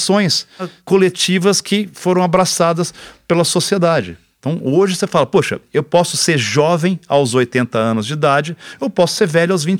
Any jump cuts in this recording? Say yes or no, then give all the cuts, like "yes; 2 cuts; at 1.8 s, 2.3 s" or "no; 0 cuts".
no; 0 cuts